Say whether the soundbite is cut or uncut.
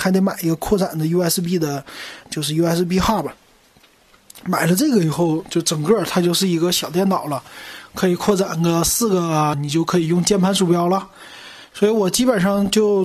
cut